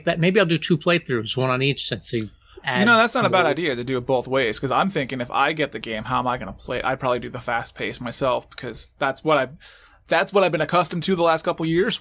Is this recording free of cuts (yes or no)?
yes